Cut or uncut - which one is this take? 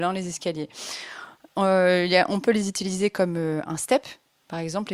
uncut